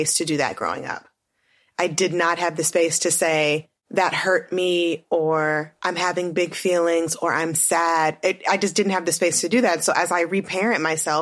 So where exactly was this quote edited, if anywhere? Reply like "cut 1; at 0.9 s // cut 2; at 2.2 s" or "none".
none

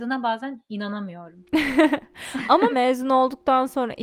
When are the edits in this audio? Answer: cut 1; at 2.7 s

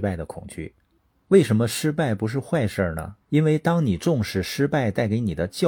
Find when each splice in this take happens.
cut 1; at 3.2 s

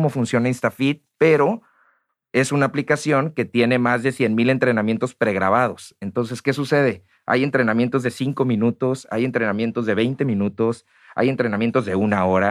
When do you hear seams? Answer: none

